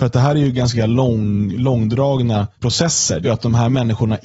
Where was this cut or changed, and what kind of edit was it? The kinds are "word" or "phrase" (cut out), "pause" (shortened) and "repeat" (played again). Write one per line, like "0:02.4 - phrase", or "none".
0:02.5 - pause
0:03.2 - word